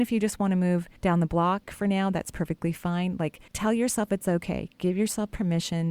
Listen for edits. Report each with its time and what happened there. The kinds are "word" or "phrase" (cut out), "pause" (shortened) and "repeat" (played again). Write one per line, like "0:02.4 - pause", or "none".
0:01.0 - pause
0:03.5 - pause